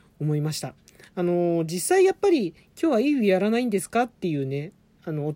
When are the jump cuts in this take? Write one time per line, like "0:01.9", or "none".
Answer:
0:04.1

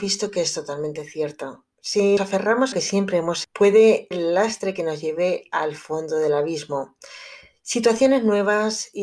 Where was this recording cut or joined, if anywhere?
0:02.2
0:02.7
0:03.4
0:04.1

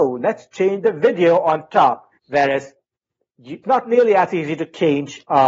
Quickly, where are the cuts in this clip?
0:02.2
0:03.6

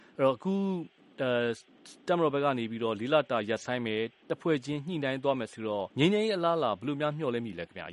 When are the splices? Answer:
0:05.9

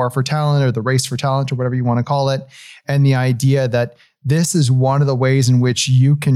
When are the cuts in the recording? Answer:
none

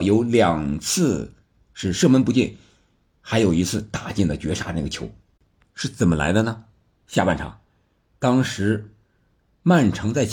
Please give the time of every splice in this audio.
none

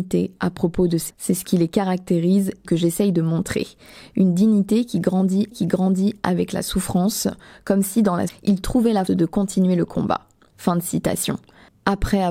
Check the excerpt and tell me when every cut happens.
0:01.1
0:02.6
0:05.5
0:08.3
0:09.1

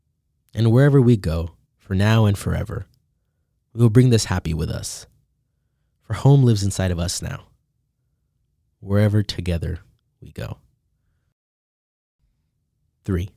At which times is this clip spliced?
0:01.7

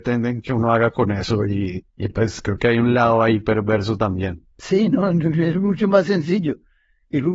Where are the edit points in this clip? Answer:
0:01.9
0:04.5

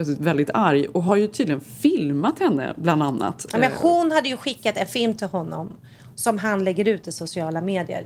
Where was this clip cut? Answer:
none

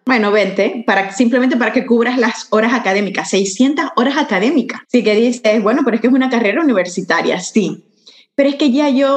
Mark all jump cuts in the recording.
0:04.8

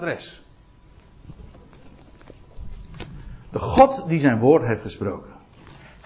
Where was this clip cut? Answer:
none

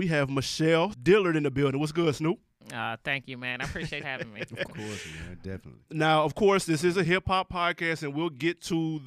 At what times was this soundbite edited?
0:00.9
0:04.0
0:04.7

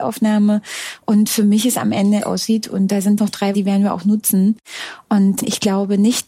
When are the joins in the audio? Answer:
0:02.2
0:03.2
0:03.5

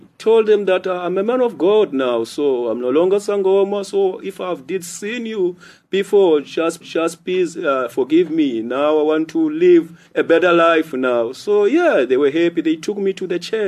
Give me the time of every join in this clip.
0:06.8
0:10.1

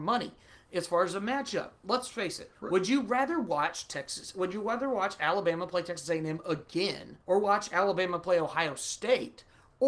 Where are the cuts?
0:02.6
0:07.2

